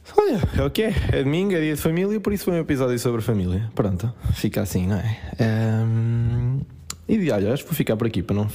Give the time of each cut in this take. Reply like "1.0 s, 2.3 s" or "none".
none